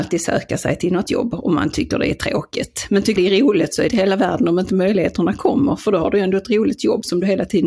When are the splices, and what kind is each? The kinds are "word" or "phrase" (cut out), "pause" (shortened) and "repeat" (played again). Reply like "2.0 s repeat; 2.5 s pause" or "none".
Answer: 1.1 s word; 3.2 s word; 3.9 s word